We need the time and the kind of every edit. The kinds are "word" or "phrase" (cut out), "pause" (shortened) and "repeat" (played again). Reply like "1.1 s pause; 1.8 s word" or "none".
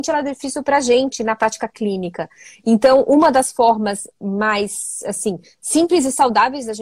none